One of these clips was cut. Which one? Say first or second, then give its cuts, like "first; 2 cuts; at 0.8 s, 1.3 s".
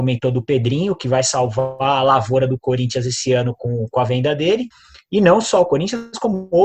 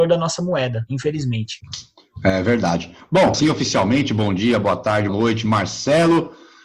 second; 2 cuts; at 3.3 s, 5.1 s